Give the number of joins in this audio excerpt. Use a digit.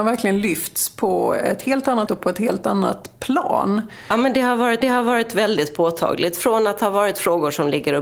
2